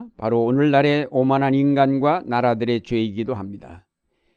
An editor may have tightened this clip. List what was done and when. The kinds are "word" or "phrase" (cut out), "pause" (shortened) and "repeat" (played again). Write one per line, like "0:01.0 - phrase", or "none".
none

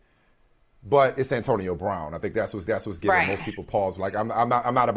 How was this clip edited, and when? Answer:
0:02.7 - repeat

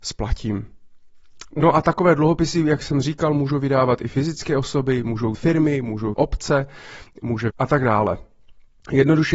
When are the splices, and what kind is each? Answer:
0:05.3 - word
0:06.1 - word
0:07.5 - phrase

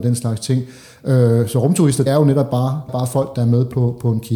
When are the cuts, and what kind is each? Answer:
0:02.1 - word
0:02.9 - phrase

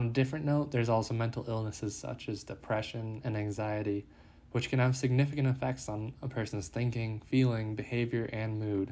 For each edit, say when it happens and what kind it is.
none

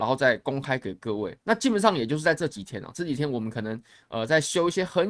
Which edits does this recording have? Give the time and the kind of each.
0:01.4 - pause

